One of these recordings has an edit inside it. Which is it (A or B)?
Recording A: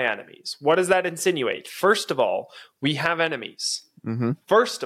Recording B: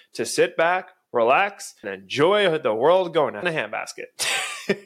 B